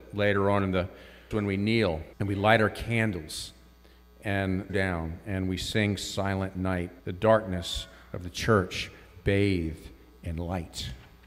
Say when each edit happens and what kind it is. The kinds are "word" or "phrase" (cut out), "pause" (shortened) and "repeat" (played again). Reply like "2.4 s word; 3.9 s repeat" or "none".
1.3 s word; 2.1 s pause; 4.7 s phrase; 7.0 s pause